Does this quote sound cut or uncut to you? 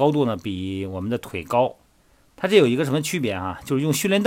uncut